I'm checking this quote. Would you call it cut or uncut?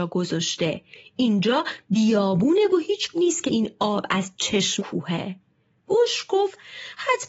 cut